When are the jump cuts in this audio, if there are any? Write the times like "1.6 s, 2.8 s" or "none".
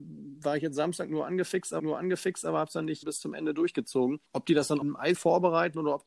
1.8 s, 3.0 s, 4.3 s, 4.8 s, 5.1 s